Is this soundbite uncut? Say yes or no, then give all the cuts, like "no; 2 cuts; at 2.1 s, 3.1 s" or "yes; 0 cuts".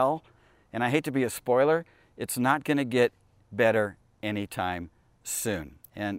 yes; 0 cuts